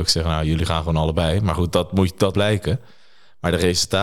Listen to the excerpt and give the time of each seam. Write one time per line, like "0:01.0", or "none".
0:01.7
0:02.3